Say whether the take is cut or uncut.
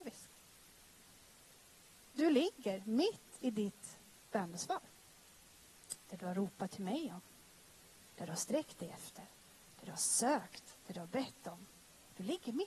uncut